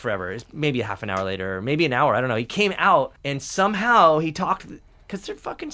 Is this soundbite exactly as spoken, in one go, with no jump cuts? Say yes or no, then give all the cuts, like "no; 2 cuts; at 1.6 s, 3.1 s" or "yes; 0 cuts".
no; 1 cut; at 3.2 s